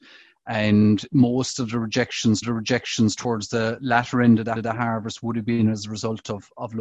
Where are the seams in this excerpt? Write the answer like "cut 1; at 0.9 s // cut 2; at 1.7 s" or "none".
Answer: cut 1; at 2.4 s // cut 2; at 4.6 s